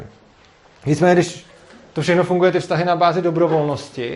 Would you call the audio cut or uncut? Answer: uncut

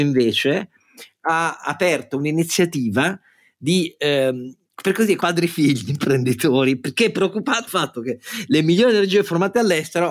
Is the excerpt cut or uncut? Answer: cut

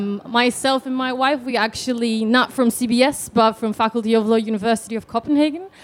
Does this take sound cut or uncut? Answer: uncut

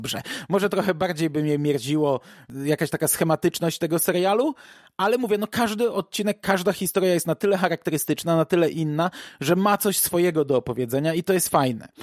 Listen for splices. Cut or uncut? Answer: uncut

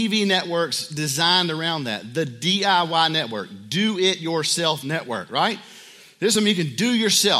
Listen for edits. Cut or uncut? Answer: uncut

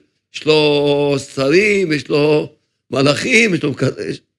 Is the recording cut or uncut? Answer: uncut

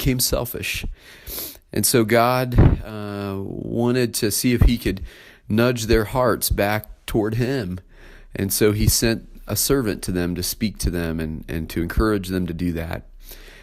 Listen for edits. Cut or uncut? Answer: uncut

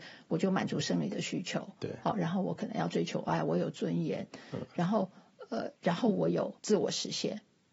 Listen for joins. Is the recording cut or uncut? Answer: cut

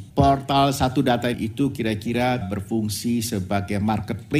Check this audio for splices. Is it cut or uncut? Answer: cut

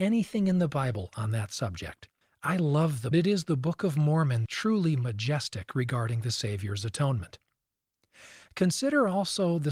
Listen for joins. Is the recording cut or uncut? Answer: cut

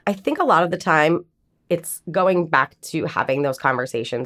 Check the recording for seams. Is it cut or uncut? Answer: uncut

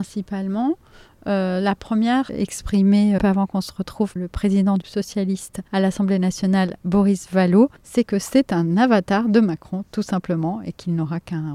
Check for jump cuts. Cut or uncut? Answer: cut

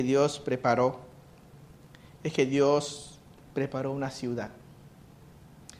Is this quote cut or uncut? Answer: uncut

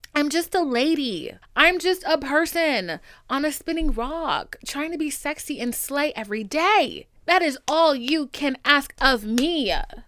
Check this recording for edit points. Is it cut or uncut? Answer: cut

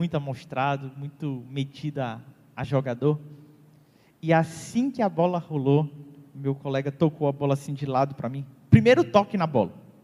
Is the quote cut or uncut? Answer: uncut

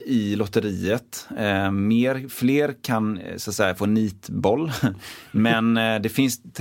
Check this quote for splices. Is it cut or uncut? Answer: uncut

